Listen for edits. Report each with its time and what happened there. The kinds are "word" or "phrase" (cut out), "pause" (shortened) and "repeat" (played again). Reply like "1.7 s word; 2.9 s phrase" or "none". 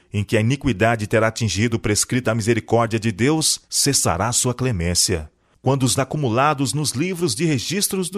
2.2 s word; 3.6 s pause; 6.0 s word